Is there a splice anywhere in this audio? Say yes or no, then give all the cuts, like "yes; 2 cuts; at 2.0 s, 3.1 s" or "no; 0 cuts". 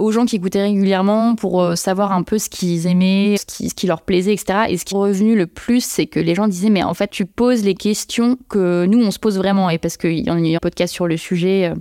yes; 3 cuts; at 3.4 s, 4.9 s, 10.6 s